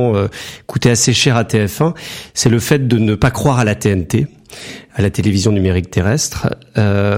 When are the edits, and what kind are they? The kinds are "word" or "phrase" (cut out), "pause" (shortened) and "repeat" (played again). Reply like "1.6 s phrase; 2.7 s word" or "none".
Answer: none